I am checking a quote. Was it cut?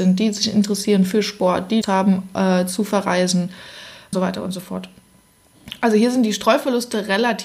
yes; 2 cuts; at 1.8 s, 4.1 s

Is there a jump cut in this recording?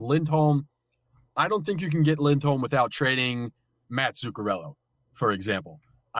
no; 0 cuts

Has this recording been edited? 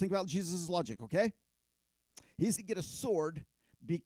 yes; 1 cut; at 2.6 s

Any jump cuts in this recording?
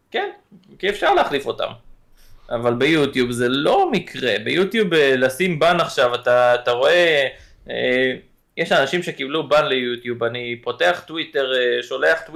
no; 0 cuts

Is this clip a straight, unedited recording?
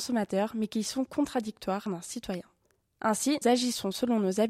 no; 2 cuts; at 1.9 s, 3.4 s

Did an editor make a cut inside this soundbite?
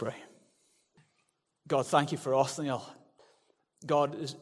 no; 0 cuts

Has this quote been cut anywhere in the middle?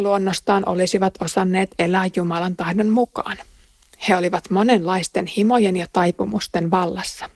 no; 0 cuts

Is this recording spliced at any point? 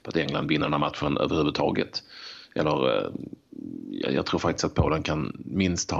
no; 0 cuts

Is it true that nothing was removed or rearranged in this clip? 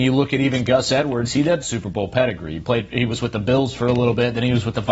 no; 1 cut; at 1.6 s

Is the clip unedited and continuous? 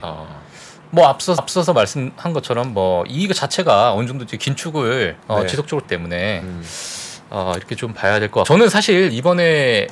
no; 4 cuts; at 1.4 s, 5.2 s, 5.8 s, 8.4 s

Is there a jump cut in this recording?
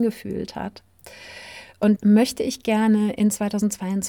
yes; 1 cut; at 2.0 s

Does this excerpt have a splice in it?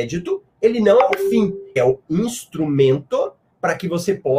yes; 1 cut; at 1.8 s

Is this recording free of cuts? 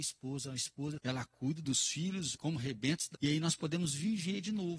no; 4 cuts; at 1.0 s, 1.6 s, 2.3 s, 3.1 s

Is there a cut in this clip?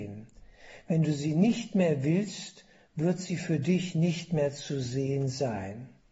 no; 0 cuts

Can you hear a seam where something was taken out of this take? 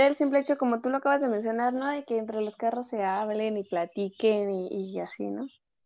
no; 0 cuts

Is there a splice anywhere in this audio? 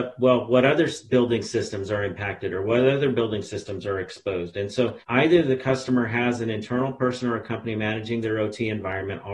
yes; 1 cut; at 5.0 s

